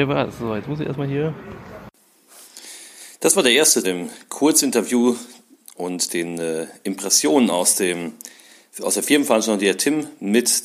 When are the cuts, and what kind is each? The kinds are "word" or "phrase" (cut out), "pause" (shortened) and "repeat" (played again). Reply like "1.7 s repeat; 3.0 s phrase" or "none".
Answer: 3.8 s phrase